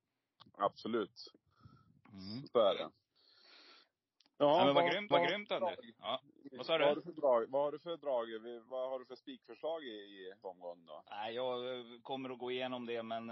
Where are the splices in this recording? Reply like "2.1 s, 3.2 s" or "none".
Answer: 5.1 s, 10.4 s